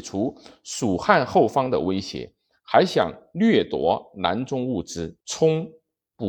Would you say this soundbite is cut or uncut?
cut